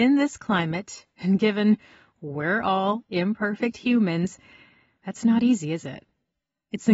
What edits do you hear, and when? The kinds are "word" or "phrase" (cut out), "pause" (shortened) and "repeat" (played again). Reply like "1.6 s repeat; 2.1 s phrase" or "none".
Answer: none